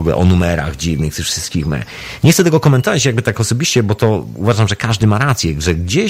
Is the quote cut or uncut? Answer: uncut